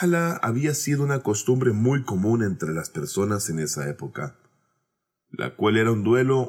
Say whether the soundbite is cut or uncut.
uncut